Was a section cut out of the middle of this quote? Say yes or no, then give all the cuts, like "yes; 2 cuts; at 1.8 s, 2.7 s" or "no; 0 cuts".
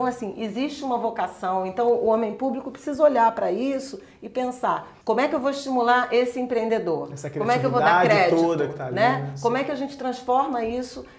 yes; 1 cut; at 5.0 s